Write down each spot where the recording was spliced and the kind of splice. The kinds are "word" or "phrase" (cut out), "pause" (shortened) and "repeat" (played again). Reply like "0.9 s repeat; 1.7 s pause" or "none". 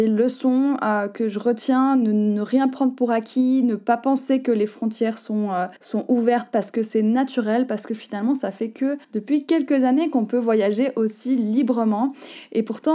5.8 s pause; 9.0 s pause